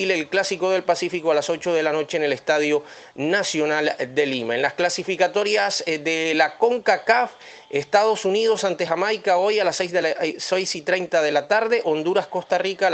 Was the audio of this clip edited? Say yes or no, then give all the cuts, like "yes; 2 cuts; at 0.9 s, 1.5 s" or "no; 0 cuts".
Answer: no; 0 cuts